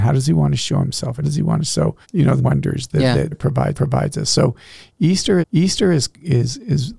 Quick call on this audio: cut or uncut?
cut